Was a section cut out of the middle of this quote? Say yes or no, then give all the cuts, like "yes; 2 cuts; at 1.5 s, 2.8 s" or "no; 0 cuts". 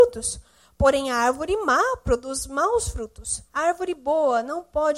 yes; 1 cut; at 3.5 s